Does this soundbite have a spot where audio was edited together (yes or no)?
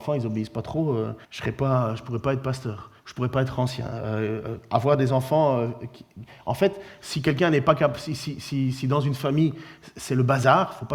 yes